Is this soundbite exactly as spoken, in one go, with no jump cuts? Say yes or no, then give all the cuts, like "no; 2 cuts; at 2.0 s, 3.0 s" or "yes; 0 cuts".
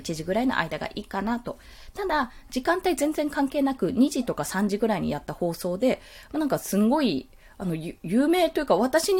yes; 0 cuts